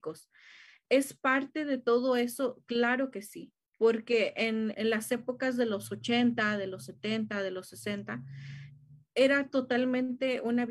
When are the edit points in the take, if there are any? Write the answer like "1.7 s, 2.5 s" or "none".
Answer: 4.7 s